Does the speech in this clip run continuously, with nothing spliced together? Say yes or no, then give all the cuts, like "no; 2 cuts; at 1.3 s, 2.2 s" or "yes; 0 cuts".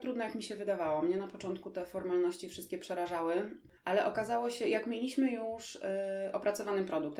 no; 1 cut; at 3.8 s